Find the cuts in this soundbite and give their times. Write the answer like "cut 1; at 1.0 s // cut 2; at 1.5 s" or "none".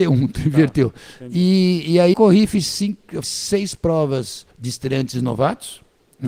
cut 1; at 2.1 s // cut 2; at 3.2 s // cut 3; at 4.5 s